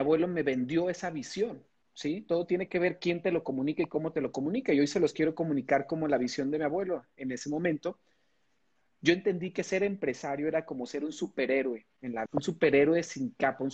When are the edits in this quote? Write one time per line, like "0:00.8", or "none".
0:12.3

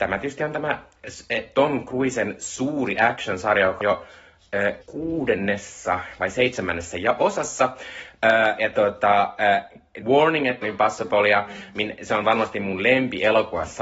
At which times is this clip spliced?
0:03.8
0:04.8
0:10.0
0:10.6

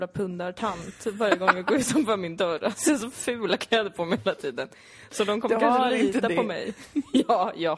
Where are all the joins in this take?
none

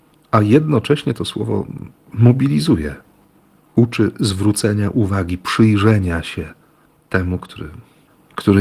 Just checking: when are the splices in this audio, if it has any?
none

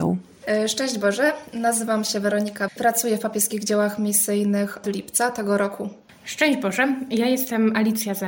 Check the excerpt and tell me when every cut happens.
0:02.7
0:04.8

